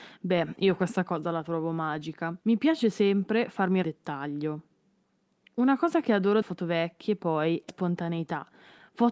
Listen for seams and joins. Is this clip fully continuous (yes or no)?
no